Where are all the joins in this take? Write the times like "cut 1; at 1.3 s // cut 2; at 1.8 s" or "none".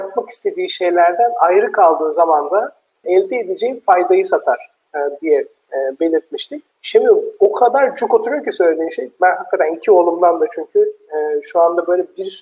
cut 1; at 3.0 s // cut 2; at 6.7 s